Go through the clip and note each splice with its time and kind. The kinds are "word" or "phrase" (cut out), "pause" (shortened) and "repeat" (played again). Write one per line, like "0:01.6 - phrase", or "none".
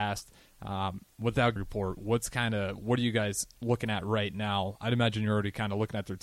0:01.6 - phrase